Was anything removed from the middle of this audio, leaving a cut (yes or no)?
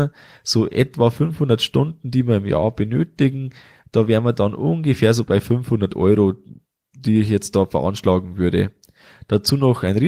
no